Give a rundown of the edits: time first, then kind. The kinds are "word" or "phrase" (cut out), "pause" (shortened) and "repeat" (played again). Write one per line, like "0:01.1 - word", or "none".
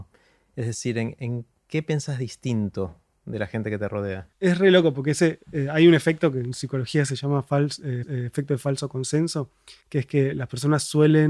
0:04.3 - pause
0:08.0 - repeat
0:09.8 - pause